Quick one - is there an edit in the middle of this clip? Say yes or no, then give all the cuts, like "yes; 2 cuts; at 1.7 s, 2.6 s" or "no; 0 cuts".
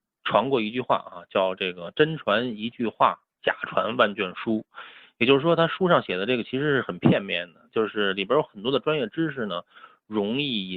yes; 1 cut; at 3.3 s